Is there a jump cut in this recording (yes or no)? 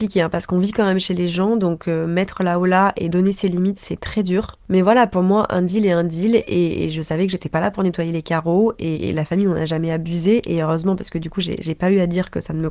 no